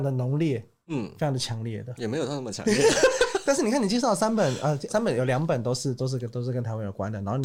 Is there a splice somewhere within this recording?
yes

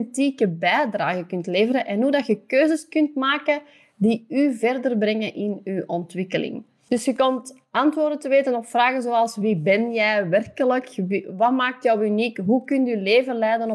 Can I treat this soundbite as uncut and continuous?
yes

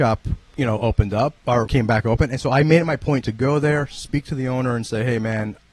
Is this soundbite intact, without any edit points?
no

